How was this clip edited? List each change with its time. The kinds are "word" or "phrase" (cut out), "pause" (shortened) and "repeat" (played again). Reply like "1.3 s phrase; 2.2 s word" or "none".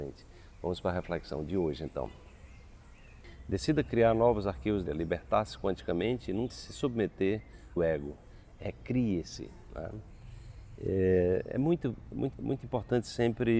4.9 s word; 6.5 s word; 7.8 s phrase; 12.3 s repeat